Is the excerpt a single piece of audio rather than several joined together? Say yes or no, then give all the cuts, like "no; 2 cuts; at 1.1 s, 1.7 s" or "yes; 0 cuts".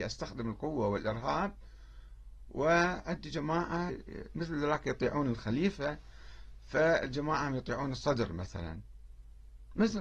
no; 1 cut; at 3.9 s